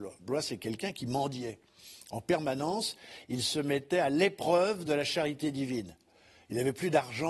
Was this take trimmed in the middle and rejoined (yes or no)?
no